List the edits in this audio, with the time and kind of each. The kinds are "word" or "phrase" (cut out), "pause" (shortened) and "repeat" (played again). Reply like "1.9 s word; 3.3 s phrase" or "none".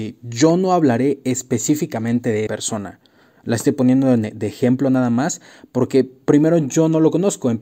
2.5 s word